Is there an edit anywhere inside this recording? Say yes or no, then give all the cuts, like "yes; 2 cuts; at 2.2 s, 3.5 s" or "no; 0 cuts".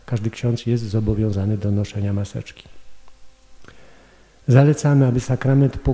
no; 0 cuts